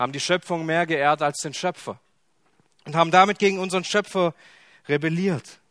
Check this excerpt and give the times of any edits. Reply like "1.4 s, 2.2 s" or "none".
none